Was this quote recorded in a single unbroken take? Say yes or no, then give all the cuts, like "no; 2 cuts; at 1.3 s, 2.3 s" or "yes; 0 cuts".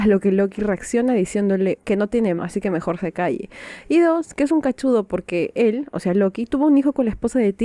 no; 2 cuts; at 1.8 s, 2.4 s